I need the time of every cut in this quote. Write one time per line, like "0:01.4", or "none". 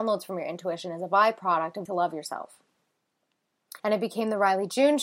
0:01.9
0:03.8